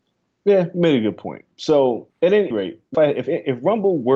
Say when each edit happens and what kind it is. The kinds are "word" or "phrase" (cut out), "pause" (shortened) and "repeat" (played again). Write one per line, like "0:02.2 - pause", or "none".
0:02.1 - pause
0:02.5 - word
0:02.9 - phrase